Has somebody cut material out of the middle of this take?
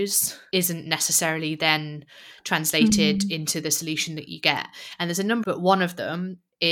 yes; 1 cut; at 5.4 s

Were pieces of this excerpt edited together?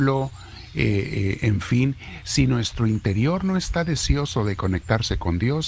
no; 0 cuts

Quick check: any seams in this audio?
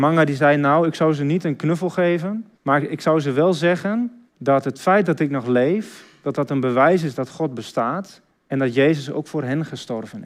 yes; 3 cuts; at 2.6 s, 4.3 s, 8.3 s

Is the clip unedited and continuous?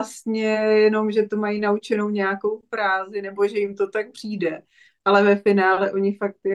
yes; 0 cuts

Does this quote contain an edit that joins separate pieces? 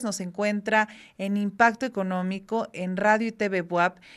no; 0 cuts

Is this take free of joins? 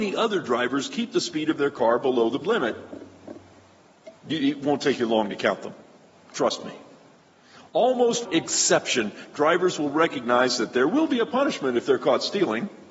no; 2 cuts; at 2.4 s, 8.2 s

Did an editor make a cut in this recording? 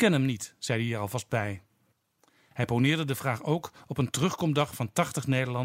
no; 0 cuts

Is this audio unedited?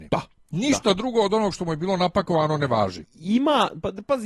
yes; 0 cuts

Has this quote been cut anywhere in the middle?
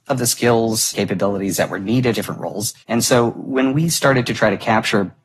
yes; 3 cuts; at 0.9 s, 2.1 s, 2.8 s

